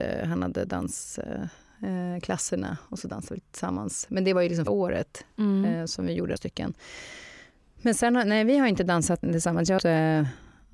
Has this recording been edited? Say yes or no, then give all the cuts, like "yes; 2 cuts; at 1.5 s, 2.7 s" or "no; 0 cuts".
yes; 4 cuts; at 4.7 s, 6.4 s, 9.2 s, 9.8 s